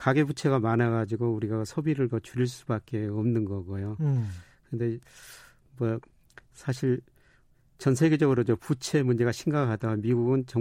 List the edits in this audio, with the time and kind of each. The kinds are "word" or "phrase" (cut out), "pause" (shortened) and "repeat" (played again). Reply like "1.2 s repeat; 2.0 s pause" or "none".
none